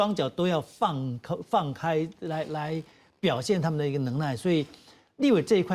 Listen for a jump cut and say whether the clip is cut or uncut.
uncut